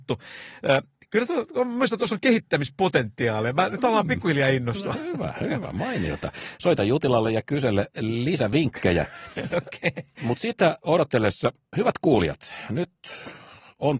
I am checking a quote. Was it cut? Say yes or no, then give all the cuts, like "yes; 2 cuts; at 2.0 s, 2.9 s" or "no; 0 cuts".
no; 0 cuts